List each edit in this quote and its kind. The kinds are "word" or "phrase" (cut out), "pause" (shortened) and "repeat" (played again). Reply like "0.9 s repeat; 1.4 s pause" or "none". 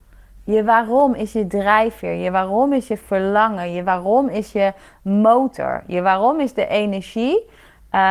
none